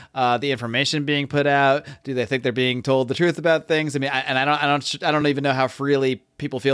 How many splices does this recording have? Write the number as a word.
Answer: zero